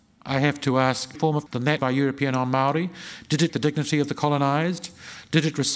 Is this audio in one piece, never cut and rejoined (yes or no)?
no